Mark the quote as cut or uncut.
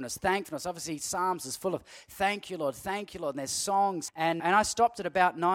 cut